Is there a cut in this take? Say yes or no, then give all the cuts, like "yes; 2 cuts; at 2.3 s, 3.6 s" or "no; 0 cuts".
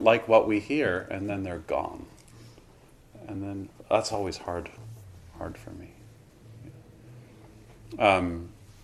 no; 0 cuts